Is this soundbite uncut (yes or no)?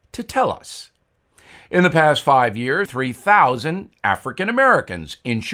no